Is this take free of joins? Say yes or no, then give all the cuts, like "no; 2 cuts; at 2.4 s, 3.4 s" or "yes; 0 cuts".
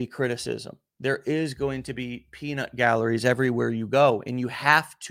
yes; 0 cuts